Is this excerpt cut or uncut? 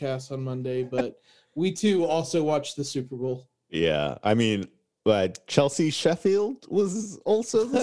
uncut